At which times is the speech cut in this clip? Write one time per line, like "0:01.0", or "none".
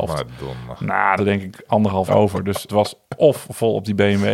0:01.2
0:02.1
0:02.7